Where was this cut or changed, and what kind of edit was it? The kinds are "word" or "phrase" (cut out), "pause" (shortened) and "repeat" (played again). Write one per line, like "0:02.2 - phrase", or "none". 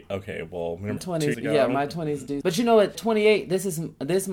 0:01.0 - word
0:01.3 - word
0:02.4 - word
0:03.0 - word